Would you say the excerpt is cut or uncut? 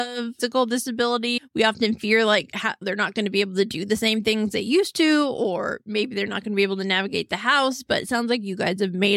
uncut